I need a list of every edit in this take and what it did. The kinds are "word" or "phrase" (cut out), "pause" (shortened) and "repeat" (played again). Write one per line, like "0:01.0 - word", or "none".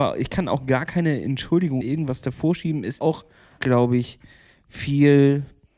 0:01.8 - word
0:03.0 - word
0:03.6 - word